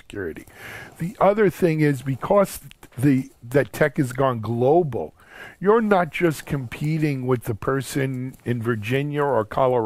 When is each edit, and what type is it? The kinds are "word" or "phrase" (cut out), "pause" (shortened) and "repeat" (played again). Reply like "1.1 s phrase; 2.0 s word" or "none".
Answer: none